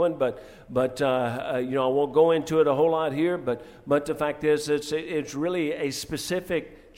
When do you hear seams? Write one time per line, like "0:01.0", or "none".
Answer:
none